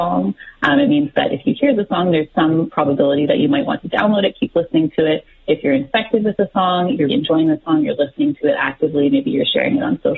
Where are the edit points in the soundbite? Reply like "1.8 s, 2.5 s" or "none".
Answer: 7.1 s